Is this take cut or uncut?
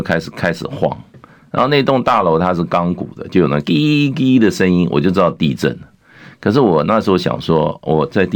uncut